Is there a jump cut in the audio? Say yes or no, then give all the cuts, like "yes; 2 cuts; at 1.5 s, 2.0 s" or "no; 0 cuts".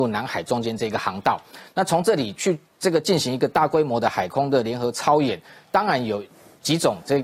no; 0 cuts